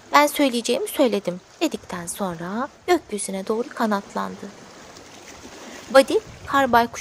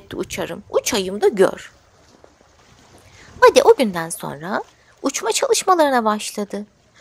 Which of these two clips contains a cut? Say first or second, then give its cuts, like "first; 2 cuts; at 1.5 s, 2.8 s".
first; 1 cut; at 2.8 s